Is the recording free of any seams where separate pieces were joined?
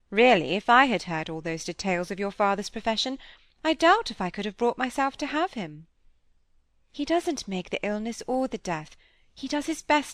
yes; 0 cuts

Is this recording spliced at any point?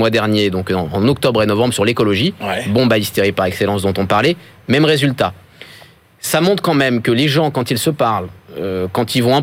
no; 0 cuts

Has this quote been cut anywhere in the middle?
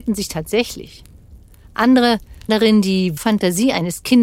yes; 2 cuts; at 2.5 s, 3.2 s

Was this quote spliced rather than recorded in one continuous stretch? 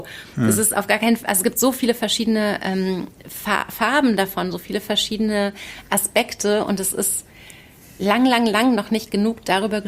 no; 0 cuts

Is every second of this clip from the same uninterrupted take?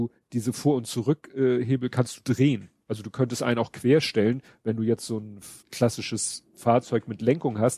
no; 1 cut; at 5.6 s

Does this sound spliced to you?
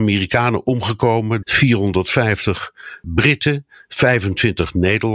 yes; 2 cuts; at 1.4 s, 3.0 s

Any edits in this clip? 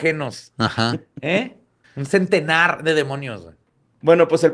yes; 1 cut; at 1.8 s

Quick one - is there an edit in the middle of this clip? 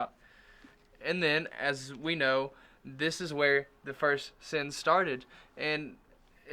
no; 0 cuts

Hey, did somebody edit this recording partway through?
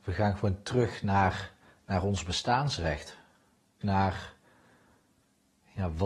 yes; 2 cuts; at 1.7 s, 3.8 s

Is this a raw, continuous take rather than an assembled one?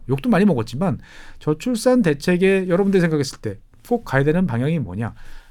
yes; 0 cuts

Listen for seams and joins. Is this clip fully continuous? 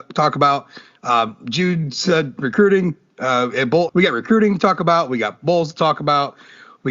no; 1 cut; at 3.9 s

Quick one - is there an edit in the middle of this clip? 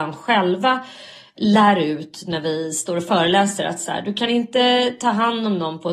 no; 0 cuts

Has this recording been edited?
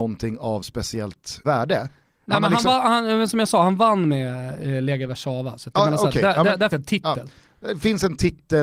yes; 2 cuts; at 1.4 s, 6.7 s

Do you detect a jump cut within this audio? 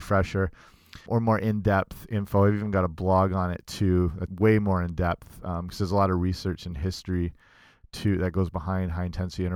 yes; 2 cuts; at 1.1 s, 4.3 s

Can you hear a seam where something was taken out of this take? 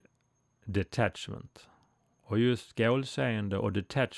no; 0 cuts

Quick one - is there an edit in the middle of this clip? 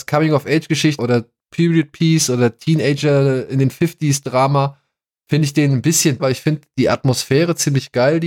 yes; 2 cuts; at 1.0 s, 6.2 s

